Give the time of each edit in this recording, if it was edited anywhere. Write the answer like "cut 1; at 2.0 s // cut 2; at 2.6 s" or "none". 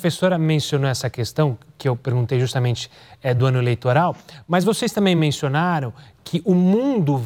none